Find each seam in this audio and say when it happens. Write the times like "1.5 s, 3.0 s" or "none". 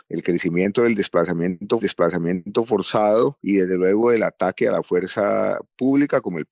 1.8 s